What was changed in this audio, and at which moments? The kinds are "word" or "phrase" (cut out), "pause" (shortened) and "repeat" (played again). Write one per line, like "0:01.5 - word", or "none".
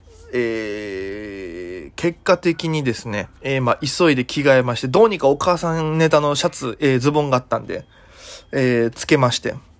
0:03.4 - pause